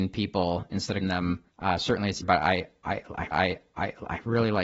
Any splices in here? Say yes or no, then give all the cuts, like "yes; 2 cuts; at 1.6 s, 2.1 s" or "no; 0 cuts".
yes; 4 cuts; at 1.0 s, 1.5 s, 2.2 s, 3.3 s